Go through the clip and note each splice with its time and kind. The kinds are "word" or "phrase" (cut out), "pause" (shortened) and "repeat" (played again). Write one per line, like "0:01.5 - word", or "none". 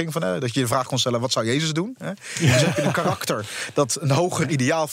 none